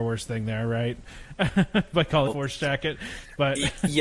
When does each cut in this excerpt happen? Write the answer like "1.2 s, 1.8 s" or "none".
2.3 s

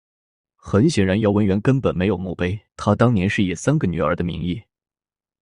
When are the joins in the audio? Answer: 2.7 s

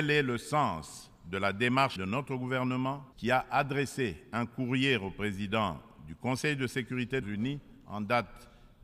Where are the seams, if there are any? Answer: 2.0 s, 3.1 s, 7.2 s

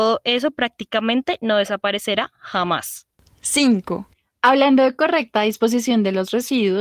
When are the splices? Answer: none

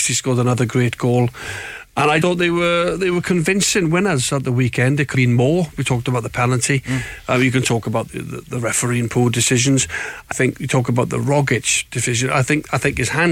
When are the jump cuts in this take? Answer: 2.2 s, 5.1 s, 8.1 s, 10.3 s

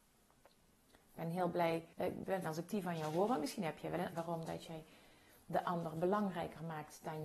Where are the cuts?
1.9 s, 2.4 s, 4.1 s

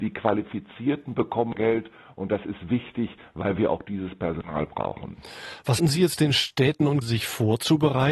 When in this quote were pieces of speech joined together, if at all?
1.5 s, 5.8 s, 7.0 s

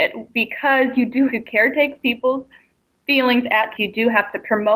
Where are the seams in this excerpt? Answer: 1.3 s, 2.0 s, 3.7 s

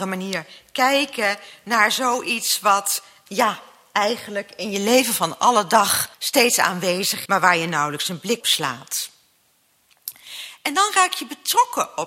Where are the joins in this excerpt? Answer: 3.3 s, 6.1 s, 7.3 s, 8.4 s

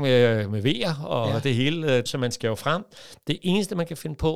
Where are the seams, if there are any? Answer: 2.1 s

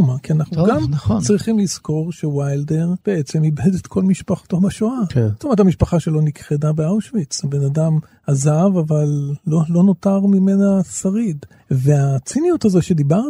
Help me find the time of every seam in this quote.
3.0 s, 11.6 s

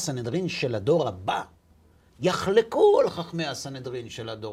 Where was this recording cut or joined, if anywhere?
none

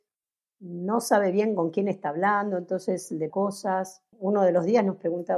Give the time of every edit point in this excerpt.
3.3 s, 4.1 s

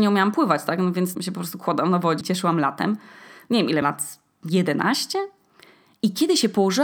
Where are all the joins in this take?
1.1 s, 2.2 s, 3.8 s

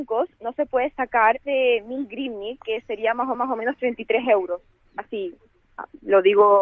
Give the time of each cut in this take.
1.4 s, 3.3 s

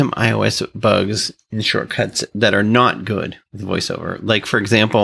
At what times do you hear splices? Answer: none

